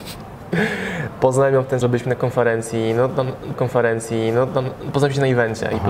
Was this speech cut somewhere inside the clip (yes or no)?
yes